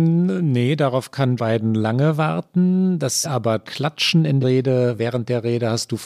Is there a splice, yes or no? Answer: yes